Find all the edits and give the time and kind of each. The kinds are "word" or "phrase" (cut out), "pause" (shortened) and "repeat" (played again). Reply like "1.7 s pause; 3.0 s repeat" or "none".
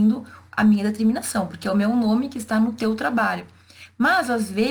none